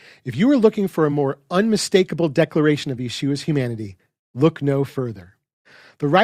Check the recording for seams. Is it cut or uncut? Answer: uncut